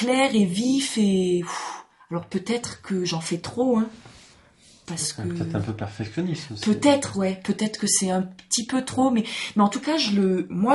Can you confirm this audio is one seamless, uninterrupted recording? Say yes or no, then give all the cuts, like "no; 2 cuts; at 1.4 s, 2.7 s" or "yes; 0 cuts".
yes; 0 cuts